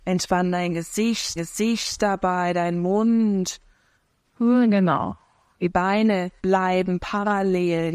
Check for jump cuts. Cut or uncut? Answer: cut